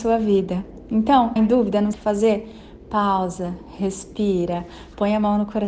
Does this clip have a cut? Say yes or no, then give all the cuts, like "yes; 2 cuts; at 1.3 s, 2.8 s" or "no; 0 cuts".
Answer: yes; 2 cuts; at 1.4 s, 1.9 s